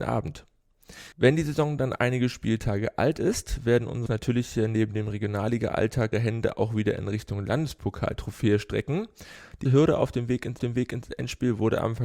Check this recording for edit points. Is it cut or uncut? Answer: cut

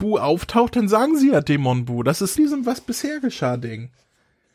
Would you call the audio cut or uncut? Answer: cut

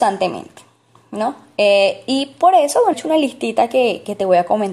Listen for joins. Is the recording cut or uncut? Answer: cut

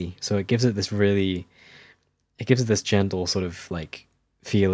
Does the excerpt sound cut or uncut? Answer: uncut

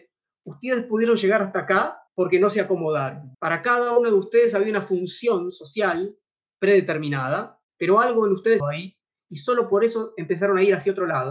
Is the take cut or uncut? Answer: cut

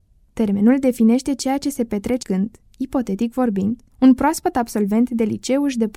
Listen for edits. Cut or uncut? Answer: cut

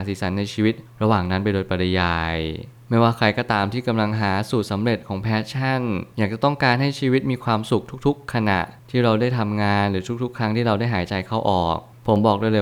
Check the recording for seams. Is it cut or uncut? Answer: cut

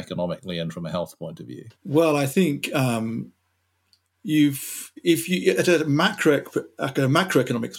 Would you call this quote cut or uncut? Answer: cut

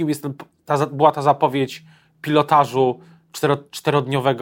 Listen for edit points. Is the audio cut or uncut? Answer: uncut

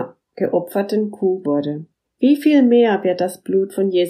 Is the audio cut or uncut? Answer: cut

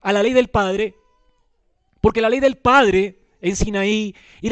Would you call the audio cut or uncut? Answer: uncut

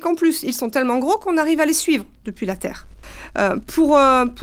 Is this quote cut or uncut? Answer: uncut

